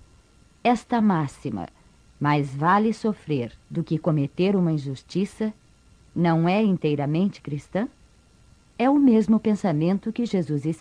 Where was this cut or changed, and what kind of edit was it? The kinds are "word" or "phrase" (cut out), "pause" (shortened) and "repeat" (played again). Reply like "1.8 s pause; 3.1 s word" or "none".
3.6 s pause